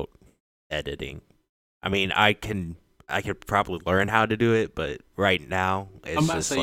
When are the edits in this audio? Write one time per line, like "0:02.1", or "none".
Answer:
none